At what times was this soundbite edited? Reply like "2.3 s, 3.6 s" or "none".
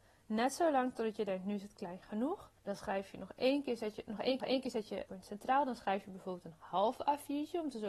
2.6 s, 4.4 s, 5.1 s